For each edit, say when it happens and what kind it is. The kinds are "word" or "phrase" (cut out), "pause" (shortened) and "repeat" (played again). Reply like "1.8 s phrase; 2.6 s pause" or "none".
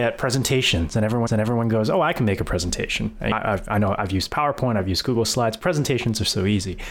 1.3 s repeat